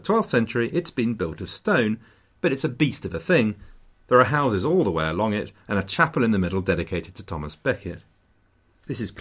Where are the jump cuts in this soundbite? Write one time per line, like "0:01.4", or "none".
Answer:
none